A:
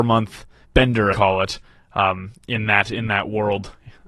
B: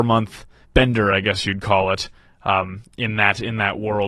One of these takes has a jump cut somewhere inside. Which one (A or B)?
A